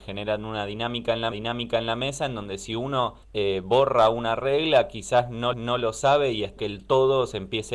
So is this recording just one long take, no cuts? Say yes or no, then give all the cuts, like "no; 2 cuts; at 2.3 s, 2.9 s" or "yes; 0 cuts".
no; 4 cuts; at 1.3 s, 3.2 s, 5.5 s, 6.6 s